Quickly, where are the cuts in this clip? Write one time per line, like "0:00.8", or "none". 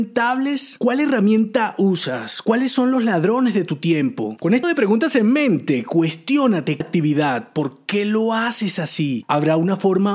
0:04.6
0:06.8